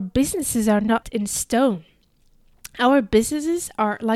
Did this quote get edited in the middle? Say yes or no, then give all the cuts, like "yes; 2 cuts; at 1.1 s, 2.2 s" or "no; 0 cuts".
yes; 1 cut; at 1.0 s